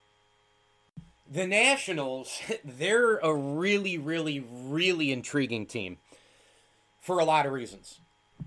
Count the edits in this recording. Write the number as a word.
zero